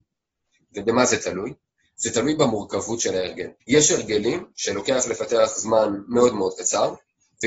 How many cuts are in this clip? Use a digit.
1